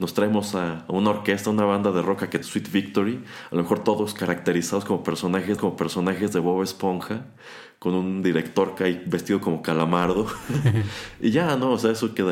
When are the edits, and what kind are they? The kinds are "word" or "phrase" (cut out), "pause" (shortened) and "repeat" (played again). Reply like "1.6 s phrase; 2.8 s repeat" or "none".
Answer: 2.4 s word; 5.6 s repeat